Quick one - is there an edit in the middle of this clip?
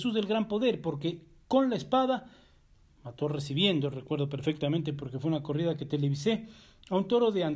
no; 0 cuts

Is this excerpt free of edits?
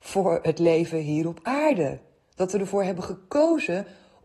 yes; 0 cuts

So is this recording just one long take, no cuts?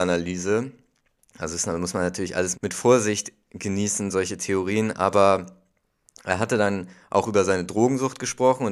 no; 1 cut; at 2.5 s

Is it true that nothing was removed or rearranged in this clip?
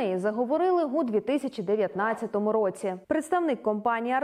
no; 1 cut; at 3.0 s

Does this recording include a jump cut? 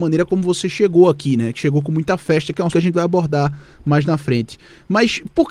yes; 1 cut; at 2.7 s

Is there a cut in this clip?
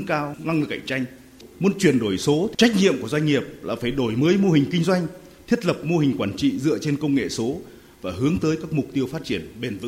no; 0 cuts

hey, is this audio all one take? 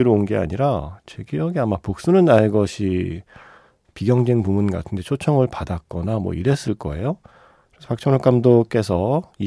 yes; 0 cuts

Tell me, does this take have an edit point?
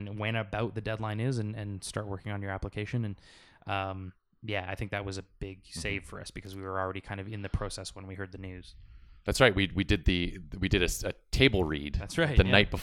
no; 0 cuts

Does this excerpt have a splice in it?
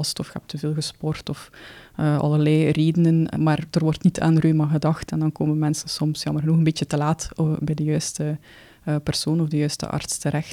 yes; 1 cut; at 3.4 s

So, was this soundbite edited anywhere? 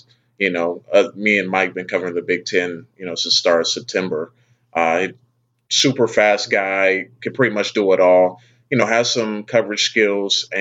yes; 1 cut; at 7.2 s

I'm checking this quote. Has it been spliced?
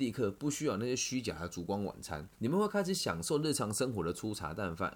yes; 1 cut; at 2.3 s

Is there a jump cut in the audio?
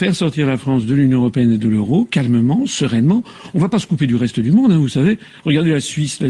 no; 0 cuts

